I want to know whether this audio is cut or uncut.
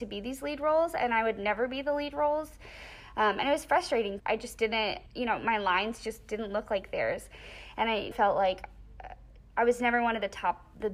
cut